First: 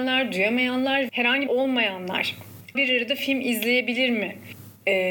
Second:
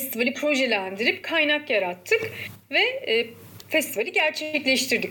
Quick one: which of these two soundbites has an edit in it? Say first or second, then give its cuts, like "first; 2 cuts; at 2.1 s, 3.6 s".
first; 3 cuts; at 1.1 s, 1.5 s, 2.7 s